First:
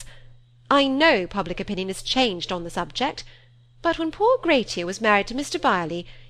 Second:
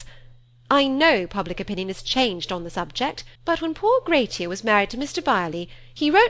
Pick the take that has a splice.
second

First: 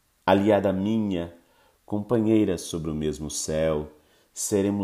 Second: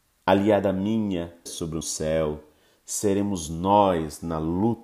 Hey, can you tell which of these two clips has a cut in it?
second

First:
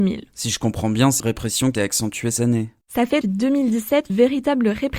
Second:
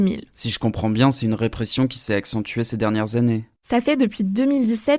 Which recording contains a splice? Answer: first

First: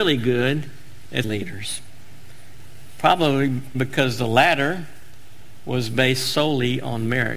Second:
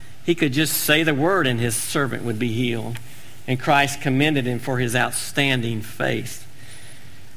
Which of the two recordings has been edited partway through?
first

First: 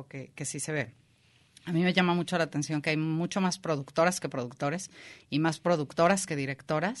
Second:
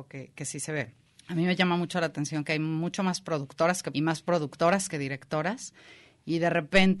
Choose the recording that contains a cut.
second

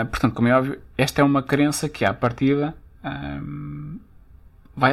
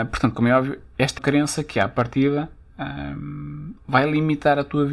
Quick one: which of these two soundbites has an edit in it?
second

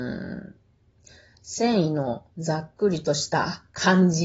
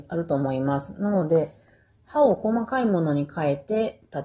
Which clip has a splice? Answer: first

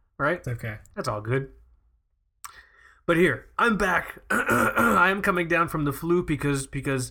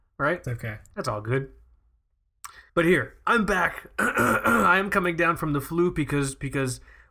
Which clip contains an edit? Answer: second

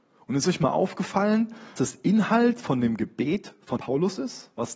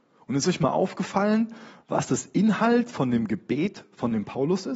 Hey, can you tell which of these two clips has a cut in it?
first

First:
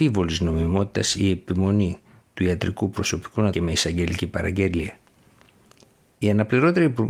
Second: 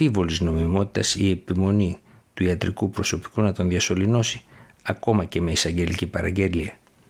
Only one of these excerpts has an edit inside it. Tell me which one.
first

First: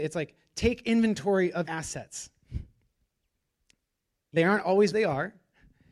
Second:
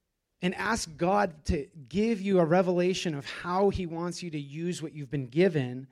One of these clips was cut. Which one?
first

